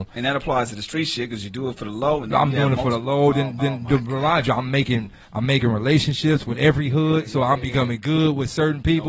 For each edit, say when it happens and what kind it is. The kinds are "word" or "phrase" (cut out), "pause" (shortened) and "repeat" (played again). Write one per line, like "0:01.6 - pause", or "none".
0:03.6 - repeat